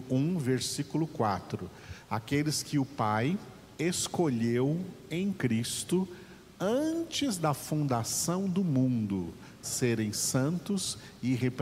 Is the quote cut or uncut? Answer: cut